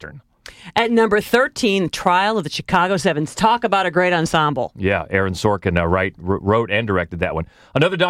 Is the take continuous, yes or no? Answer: yes